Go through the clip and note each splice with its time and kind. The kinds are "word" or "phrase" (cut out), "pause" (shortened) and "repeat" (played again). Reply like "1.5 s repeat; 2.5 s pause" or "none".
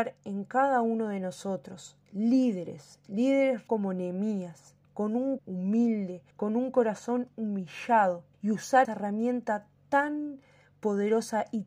3.7 s word; 4.8 s pause; 5.4 s word; 6.3 s pause; 8.3 s pause; 8.8 s word; 9.8 s pause